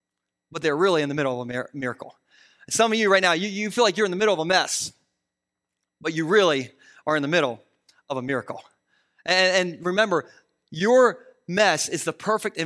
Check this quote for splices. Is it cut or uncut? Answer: uncut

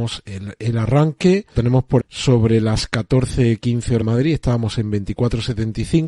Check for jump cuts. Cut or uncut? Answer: cut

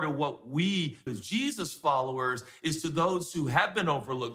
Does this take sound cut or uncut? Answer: cut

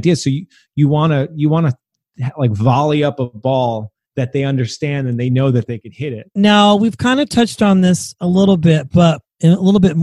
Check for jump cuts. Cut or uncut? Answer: uncut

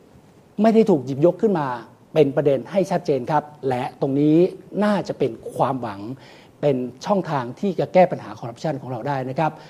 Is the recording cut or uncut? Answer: uncut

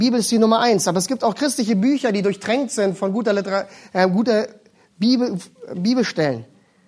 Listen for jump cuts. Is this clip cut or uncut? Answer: uncut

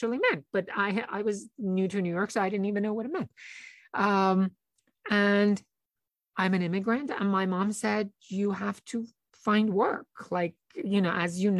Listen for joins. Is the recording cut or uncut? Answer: uncut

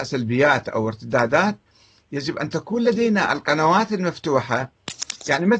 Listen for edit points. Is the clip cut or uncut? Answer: uncut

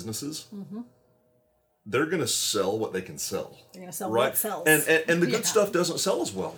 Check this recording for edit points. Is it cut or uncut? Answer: uncut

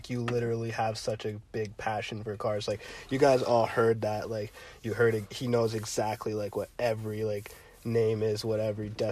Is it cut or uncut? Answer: uncut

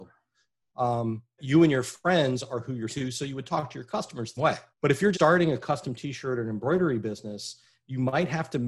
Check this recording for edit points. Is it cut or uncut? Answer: cut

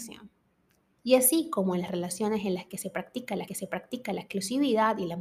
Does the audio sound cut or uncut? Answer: cut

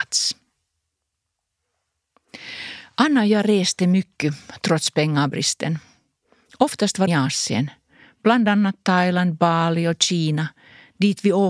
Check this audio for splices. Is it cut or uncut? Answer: cut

